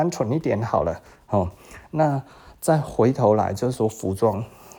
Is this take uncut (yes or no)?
yes